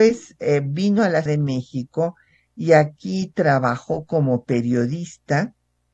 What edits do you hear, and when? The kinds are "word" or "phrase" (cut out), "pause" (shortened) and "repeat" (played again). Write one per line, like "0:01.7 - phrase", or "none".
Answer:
0:01.3 - word